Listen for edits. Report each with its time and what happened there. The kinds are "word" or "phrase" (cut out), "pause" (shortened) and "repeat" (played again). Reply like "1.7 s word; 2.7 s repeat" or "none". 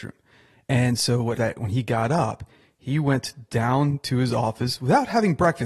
1.4 s phrase